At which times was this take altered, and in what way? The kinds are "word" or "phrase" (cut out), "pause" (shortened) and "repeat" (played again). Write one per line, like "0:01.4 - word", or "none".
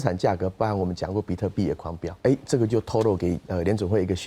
0:02.2 - pause